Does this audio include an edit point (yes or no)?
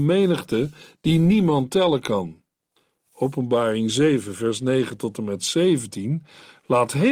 no